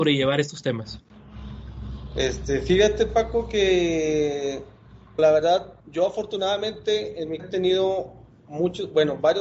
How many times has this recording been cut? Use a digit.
3